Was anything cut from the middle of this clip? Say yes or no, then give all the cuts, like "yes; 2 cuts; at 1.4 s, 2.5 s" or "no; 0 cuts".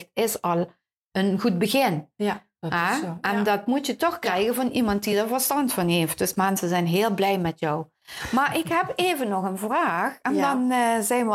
no; 0 cuts